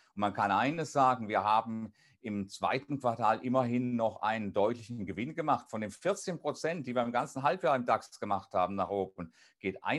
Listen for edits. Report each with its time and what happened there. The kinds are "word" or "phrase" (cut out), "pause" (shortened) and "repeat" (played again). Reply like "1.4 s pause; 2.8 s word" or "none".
none